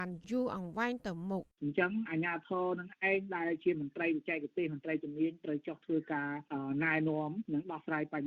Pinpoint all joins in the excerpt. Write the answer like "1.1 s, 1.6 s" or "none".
1.5 s